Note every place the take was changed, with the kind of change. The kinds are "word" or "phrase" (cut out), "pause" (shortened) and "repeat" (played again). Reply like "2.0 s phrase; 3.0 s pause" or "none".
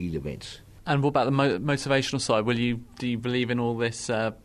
none